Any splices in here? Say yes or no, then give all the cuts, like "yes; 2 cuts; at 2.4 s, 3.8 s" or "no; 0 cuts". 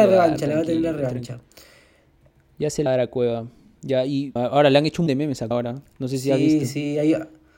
yes; 4 cuts; at 2.9 s, 4.4 s, 5.1 s, 5.5 s